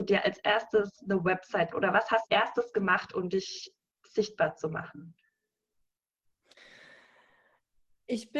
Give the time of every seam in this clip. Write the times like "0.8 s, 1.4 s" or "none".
1.7 s, 2.3 s